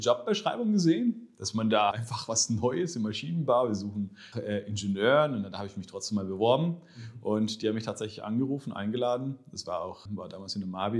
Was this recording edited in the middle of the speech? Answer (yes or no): yes